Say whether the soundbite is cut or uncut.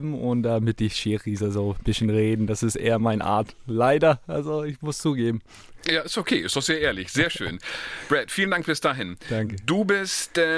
uncut